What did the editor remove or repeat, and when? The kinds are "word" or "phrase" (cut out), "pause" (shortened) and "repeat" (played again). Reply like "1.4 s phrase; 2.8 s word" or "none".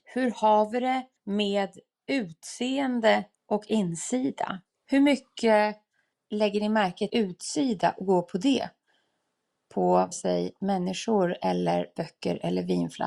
1.2 s pause; 3.3 s pause; 6.1 s pause; 7.1 s word; 10.1 s word

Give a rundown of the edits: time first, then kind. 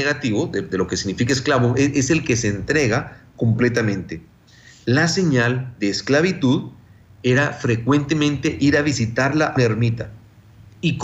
9.6 s word

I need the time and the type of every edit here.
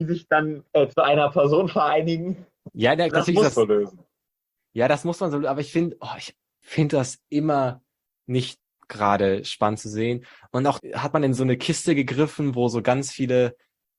3.1 s word; 3.5 s word; 10.8 s word

